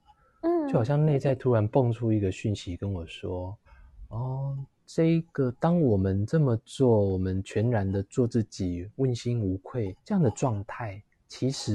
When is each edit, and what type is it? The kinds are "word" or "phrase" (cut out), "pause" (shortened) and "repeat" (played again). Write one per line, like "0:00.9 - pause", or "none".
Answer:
0:03.7 - pause
0:10.0 - pause

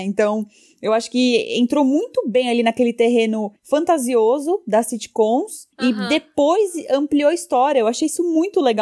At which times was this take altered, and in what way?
0:03.6 - pause
0:05.7 - pause

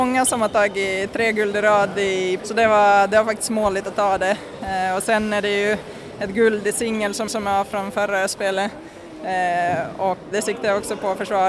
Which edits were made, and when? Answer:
0:02.4 - word
0:07.3 - repeat
0:10.3 - word

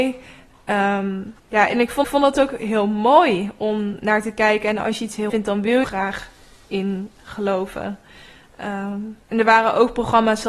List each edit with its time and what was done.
0:01.4 - pause
0:02.0 - repeat
0:05.3 - word
0:05.8 - phrase
0:09.2 - pause

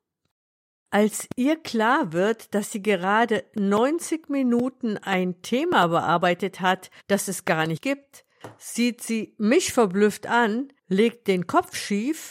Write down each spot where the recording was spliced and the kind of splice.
0:07.0 - pause
0:10.8 - pause

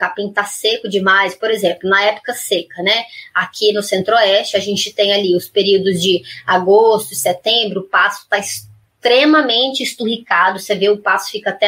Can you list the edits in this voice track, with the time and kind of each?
none

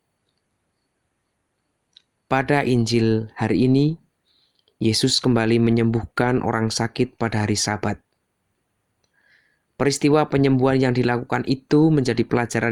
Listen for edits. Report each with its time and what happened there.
none

